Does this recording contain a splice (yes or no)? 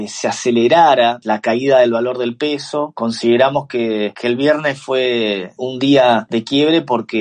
no